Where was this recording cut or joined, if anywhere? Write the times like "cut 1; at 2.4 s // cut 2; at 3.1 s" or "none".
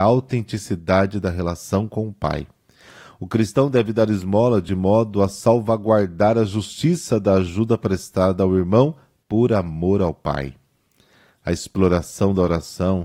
none